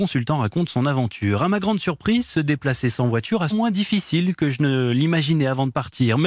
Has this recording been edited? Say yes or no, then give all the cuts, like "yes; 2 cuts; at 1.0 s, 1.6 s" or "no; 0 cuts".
yes; 1 cut; at 3.5 s